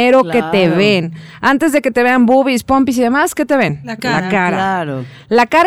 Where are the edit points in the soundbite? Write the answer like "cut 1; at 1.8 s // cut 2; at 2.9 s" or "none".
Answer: none